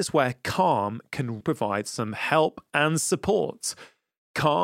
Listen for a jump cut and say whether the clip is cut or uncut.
cut